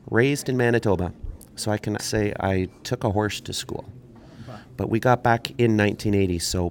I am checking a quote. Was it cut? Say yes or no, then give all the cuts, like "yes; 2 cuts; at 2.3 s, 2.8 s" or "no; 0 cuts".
yes; 1 cut; at 2.0 s